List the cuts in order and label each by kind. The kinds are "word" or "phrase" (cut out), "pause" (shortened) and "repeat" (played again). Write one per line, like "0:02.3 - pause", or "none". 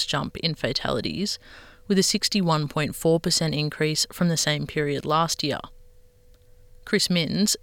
none